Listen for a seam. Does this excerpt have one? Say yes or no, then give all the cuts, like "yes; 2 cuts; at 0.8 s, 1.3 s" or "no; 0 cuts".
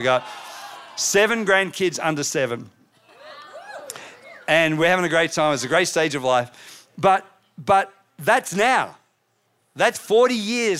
no; 0 cuts